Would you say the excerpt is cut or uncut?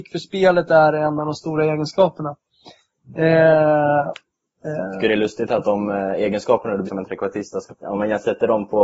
cut